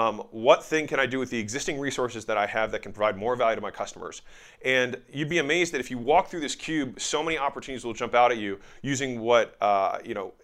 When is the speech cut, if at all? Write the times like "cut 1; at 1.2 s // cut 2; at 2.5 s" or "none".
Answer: none